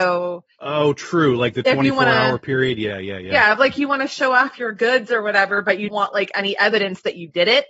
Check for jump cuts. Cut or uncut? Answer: cut